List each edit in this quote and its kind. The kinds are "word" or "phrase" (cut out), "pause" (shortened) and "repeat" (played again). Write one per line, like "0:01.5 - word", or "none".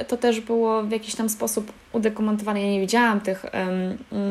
none